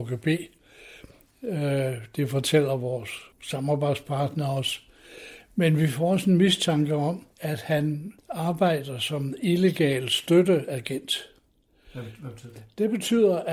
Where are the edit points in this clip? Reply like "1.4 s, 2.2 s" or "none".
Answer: 3.3 s, 7.3 s, 8.2 s